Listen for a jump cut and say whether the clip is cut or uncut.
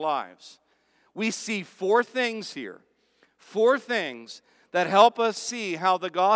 uncut